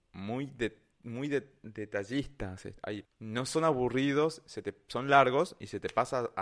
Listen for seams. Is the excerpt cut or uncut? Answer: cut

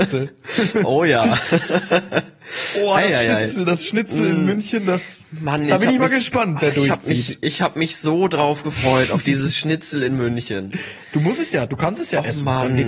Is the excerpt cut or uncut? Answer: uncut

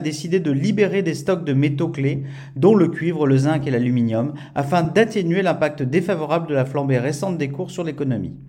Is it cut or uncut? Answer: uncut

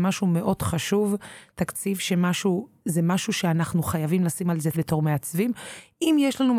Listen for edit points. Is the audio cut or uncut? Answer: cut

